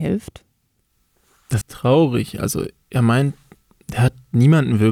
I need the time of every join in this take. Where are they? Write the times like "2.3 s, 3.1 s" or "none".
1.6 s